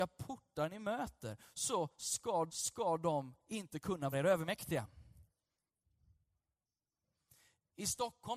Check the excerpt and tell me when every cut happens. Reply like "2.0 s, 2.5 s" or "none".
2.5 s, 4.1 s